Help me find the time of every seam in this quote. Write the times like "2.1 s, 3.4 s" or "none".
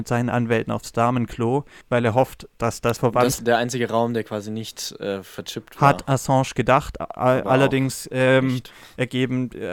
1.8 s, 3.0 s, 3.4 s